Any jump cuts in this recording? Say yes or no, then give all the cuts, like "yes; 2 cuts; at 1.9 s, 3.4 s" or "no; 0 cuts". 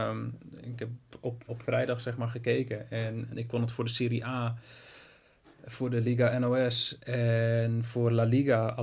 yes; 2 cuts; at 1.5 s, 3.3 s